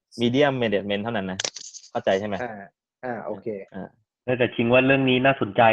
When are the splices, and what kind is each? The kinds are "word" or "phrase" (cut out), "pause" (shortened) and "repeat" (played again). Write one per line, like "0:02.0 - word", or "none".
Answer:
0:03.7 - pause